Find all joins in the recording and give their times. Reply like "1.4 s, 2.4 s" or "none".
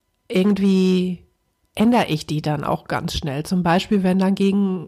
none